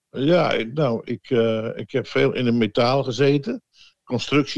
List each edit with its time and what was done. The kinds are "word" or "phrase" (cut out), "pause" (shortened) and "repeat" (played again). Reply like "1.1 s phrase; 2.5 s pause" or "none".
none

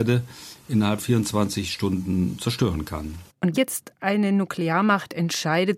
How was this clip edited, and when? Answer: 1.0 s word; 3.5 s word

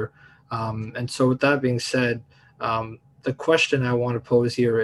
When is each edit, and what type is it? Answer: none

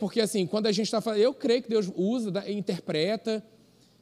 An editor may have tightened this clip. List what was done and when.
none

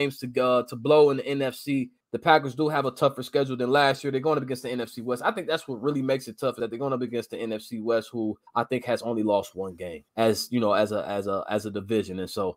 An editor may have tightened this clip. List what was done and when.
2.0 s pause; 8.5 s pause; 10.1 s pause

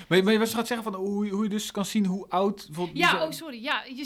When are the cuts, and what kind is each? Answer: none

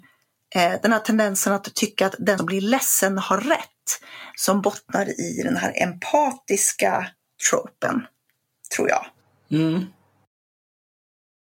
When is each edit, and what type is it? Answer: 2.4 s word

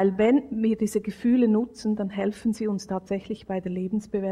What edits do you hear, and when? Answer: none

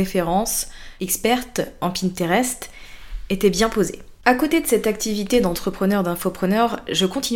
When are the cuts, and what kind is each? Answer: 4.2 s pause

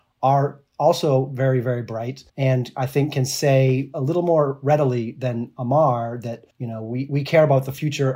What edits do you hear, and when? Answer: 2.3 s pause; 6.5 s pause

